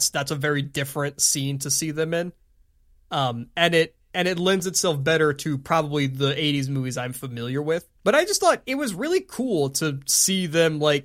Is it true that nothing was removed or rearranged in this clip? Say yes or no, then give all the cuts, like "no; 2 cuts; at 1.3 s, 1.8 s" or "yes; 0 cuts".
no; 1 cut; at 8.0 s